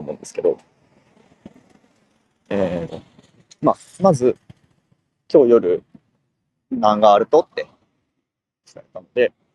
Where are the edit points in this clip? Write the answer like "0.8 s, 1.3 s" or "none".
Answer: 2.9 s